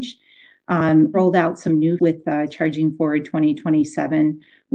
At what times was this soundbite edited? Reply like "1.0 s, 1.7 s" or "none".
1.1 s, 2.0 s

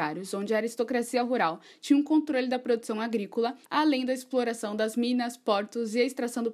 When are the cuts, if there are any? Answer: 3.6 s

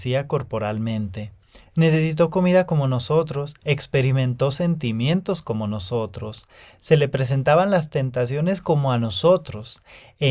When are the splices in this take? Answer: none

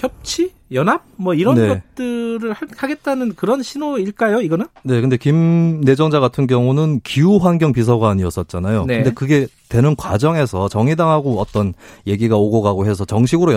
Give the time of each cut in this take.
none

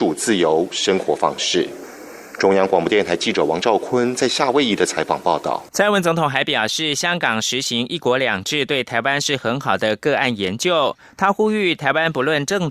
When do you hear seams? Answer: 5.7 s

